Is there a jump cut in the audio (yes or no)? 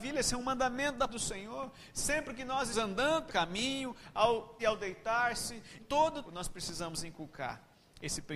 yes